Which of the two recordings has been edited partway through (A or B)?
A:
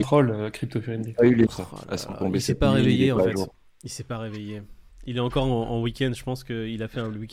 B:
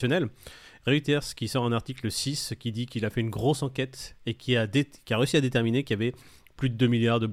A